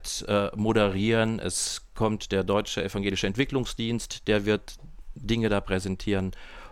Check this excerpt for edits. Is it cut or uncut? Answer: uncut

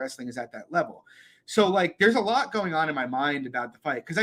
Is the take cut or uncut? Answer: uncut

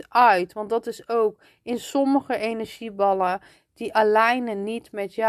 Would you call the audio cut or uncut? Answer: uncut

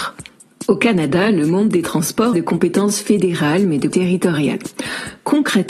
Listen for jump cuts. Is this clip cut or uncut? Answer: cut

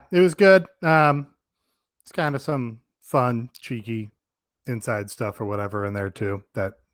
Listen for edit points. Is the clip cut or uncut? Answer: uncut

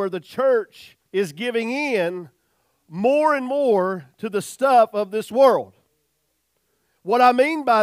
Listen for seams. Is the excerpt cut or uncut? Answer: cut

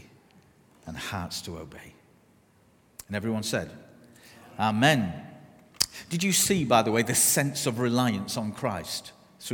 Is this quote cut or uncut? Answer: uncut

